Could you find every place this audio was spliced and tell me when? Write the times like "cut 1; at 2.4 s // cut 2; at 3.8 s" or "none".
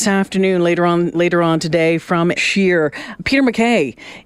cut 1; at 1.1 s // cut 2; at 2.4 s // cut 3; at 3.2 s